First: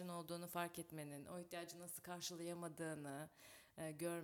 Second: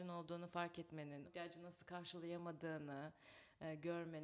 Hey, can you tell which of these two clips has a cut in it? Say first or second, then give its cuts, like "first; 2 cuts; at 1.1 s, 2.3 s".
second; 1 cut; at 1.2 s